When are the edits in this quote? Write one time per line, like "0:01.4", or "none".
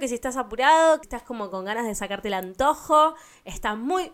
0:01.0